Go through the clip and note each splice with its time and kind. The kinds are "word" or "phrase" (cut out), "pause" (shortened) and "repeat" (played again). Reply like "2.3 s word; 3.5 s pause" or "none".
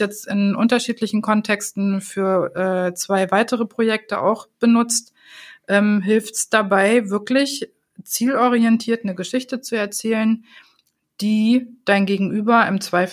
none